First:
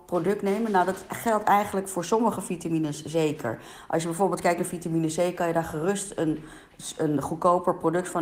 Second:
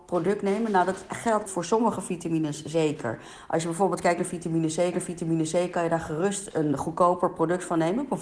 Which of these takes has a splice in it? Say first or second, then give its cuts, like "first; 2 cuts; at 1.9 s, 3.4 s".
second; 3 cuts; at 1.5 s, 4.9 s, 6.5 s